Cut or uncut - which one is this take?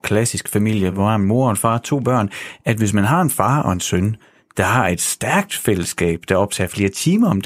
uncut